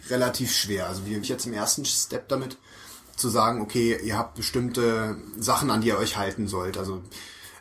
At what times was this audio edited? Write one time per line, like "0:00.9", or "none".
0:01.2